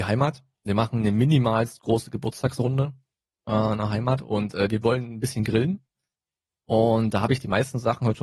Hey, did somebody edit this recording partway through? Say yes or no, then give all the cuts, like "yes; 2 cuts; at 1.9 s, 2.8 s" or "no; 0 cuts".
no; 0 cuts